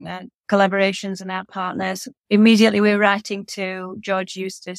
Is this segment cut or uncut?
uncut